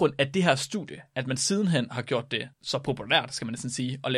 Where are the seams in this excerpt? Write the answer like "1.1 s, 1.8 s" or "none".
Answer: 2.5 s